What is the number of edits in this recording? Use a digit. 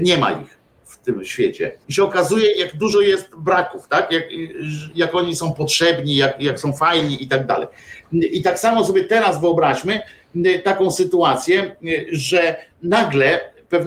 2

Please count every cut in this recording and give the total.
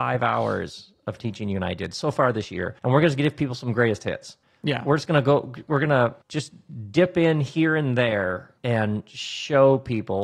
4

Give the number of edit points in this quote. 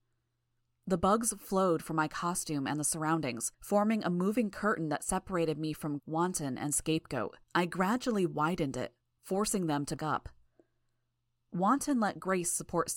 4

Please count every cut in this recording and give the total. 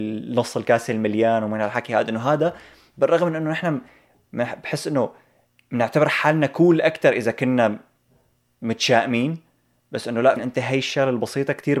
1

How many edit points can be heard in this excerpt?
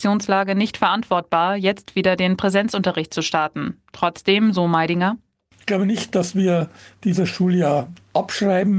0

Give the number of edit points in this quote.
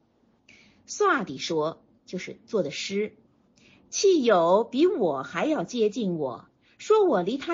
0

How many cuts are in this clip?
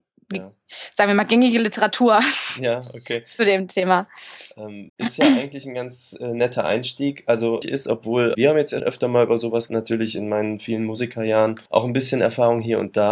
6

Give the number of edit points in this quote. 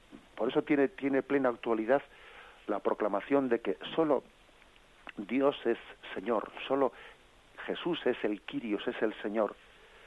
0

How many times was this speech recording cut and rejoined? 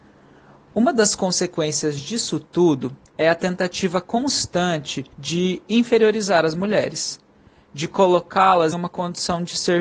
3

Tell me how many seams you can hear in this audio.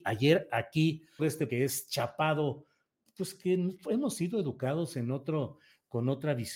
2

